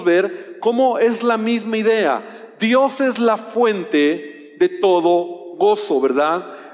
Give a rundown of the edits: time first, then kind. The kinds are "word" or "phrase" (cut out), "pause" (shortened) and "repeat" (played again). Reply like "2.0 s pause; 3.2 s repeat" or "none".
none